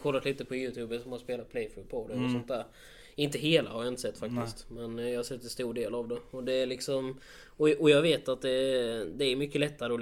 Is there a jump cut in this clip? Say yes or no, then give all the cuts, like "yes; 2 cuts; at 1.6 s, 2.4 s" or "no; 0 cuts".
no; 0 cuts